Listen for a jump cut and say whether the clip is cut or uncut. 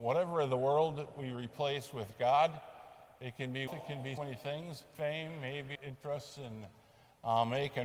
cut